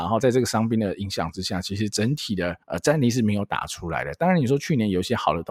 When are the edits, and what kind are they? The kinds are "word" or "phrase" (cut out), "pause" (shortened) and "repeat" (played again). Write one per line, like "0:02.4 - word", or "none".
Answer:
0:02.6 - pause